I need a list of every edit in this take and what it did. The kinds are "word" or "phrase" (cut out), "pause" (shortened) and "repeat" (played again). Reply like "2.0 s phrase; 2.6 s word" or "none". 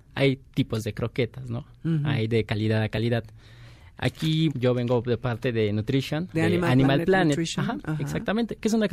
4.5 s word; 6.3 s word